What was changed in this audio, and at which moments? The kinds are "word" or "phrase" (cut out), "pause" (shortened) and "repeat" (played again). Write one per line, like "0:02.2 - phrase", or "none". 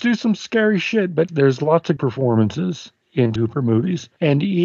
0:01.3 - word
0:02.0 - word
0:03.4 - word

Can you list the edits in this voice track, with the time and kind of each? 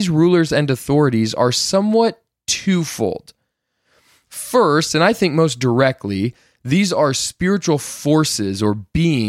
none

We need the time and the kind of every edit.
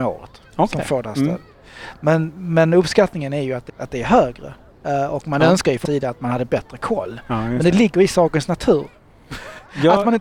0:03.7 - word
0:05.9 - word

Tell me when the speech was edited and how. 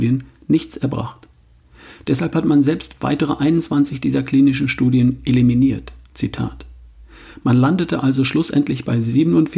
none

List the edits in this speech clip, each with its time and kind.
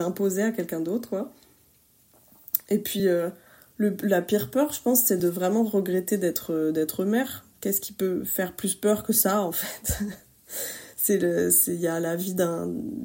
none

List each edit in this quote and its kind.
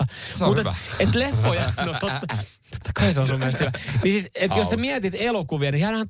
none

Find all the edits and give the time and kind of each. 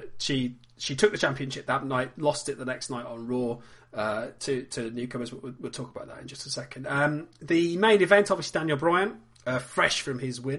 none

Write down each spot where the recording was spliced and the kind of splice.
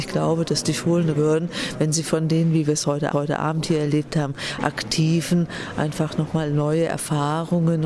0:01.2 - phrase
0:03.1 - repeat

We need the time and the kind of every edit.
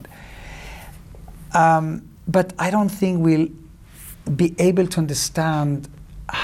0:02.2 - pause

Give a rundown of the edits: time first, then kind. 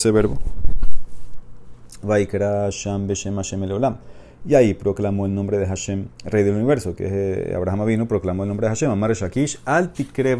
0:06.1 - pause

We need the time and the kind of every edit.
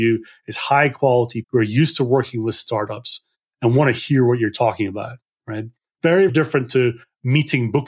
0:01.4 - word
0:06.3 - word

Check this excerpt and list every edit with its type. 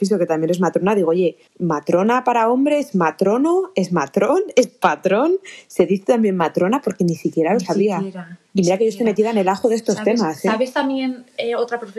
0:01.5 - pause

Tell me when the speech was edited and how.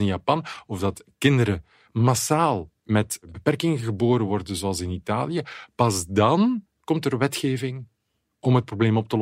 none

